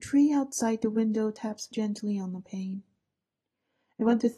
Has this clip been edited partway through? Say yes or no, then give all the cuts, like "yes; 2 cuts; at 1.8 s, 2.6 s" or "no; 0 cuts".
yes; 1 cut; at 1.7 s